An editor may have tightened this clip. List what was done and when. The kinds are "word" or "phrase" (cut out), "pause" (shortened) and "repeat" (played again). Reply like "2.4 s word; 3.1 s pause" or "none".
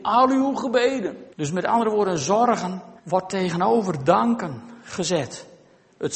1.3 s pause; 3.0 s pause